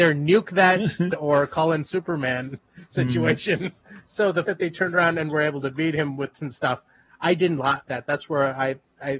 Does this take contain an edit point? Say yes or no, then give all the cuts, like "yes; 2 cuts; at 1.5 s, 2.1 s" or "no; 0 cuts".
yes; 4 cuts; at 1.1 s, 4.4 s, 6.3 s, 7.9 s